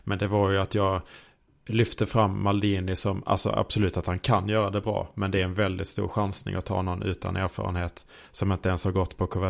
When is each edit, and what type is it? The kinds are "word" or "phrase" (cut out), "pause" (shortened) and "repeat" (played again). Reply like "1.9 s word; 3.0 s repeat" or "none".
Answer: none